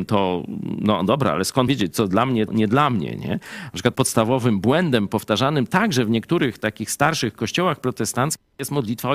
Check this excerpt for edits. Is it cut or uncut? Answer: cut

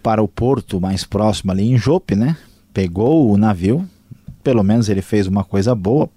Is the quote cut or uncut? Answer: uncut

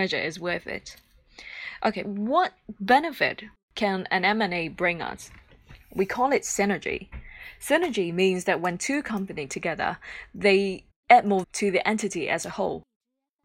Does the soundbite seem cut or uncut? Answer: cut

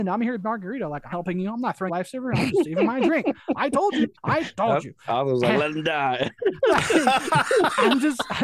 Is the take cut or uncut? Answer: cut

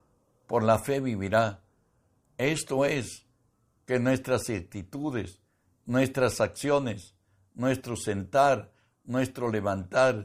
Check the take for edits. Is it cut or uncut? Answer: uncut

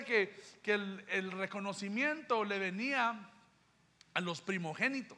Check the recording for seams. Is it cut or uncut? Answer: uncut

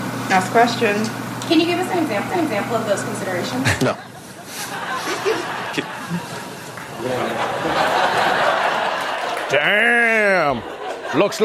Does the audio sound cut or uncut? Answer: cut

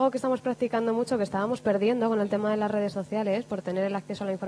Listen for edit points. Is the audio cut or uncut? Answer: uncut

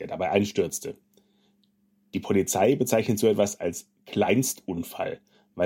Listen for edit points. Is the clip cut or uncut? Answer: uncut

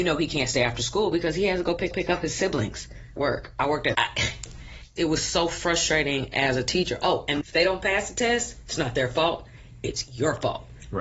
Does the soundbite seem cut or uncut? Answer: cut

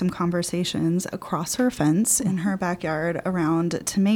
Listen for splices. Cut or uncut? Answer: cut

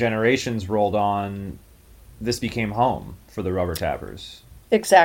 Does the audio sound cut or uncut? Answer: uncut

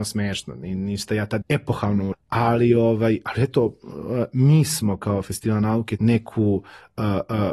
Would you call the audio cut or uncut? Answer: cut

